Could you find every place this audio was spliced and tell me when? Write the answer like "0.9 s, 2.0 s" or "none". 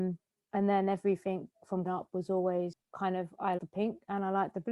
1.8 s, 2.9 s, 3.6 s